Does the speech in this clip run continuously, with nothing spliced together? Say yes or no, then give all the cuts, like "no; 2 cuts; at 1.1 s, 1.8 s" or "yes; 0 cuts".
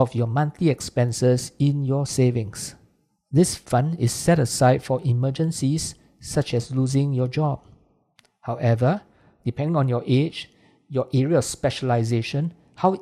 yes; 0 cuts